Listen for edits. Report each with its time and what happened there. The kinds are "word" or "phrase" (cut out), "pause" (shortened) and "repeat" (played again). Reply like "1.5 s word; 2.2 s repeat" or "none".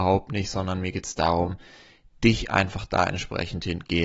none